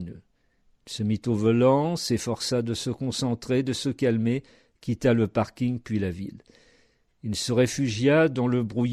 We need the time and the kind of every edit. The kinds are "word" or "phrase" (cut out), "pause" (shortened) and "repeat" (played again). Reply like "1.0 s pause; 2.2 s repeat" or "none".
none